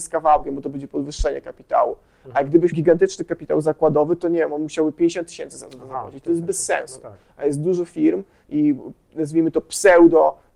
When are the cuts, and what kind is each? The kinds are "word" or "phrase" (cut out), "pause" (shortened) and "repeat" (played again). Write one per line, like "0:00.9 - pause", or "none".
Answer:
0:02.7 - word